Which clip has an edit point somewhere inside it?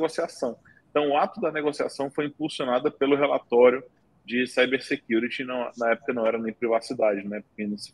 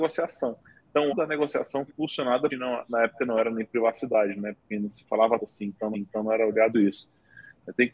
second; 6 cuts; at 1.1 s, 1.9 s, 2.5 s, 5.4 s, 5.9 s, 6.7 s

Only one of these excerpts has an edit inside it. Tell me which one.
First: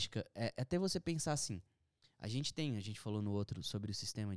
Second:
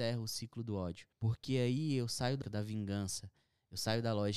second; 2 cuts; at 1.1 s, 2.4 s

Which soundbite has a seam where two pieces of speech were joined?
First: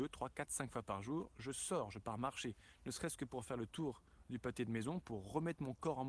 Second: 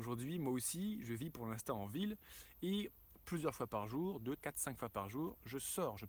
second; 1 cut; at 4.4 s

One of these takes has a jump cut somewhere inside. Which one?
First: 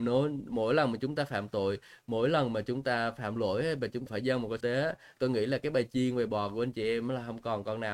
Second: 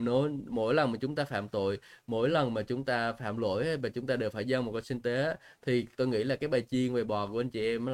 first; 3 cuts; at 4.1 s, 4.6 s, 5.2 s

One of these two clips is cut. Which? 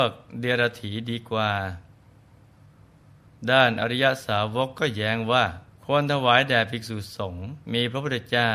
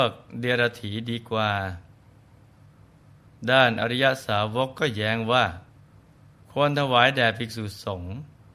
first; 2 cuts; at 5.7 s, 7.6 s

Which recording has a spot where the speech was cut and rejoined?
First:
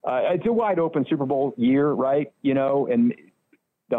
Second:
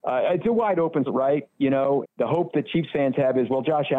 second; 2 cuts; at 1.1 s, 2.0 s

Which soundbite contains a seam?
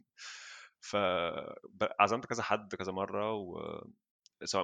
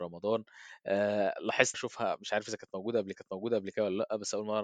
second; 2 cuts; at 1.7 s, 3.1 s

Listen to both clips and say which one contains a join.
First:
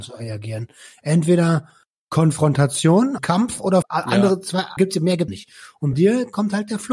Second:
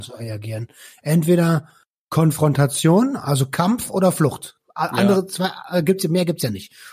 first; 5 cuts; at 3.2 s, 3.8 s, 4.8 s, 5.3 s, 5.9 s

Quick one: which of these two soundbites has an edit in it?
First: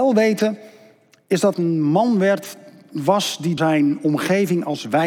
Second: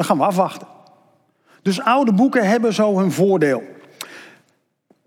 first; 2 cuts; at 1.5 s, 3.6 s

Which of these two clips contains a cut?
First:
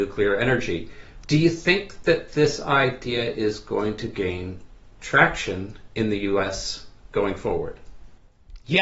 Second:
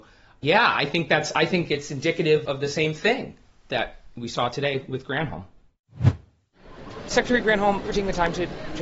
second; 2 cuts; at 2.5 s, 7.8 s

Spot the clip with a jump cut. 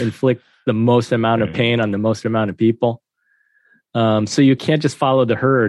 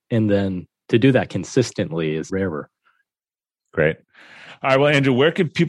second; 1 cut; at 2.3 s

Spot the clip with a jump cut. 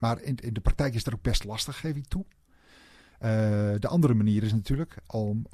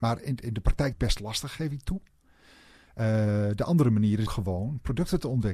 second; 2 cuts; at 0.9 s, 4.3 s

